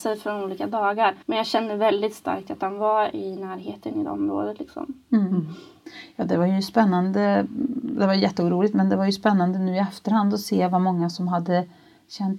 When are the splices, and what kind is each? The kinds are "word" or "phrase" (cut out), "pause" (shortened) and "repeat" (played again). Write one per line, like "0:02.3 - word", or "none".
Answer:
0:01.2 - pause